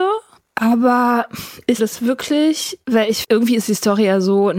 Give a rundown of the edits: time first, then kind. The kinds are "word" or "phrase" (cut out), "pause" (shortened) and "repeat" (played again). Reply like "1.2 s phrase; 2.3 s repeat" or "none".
1.8 s word; 2.8 s pause; 3.2 s word